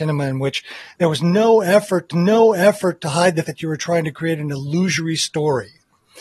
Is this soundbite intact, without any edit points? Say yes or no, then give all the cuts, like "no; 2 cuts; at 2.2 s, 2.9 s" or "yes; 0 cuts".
no; 2 cuts; at 2.1 s, 3.4 s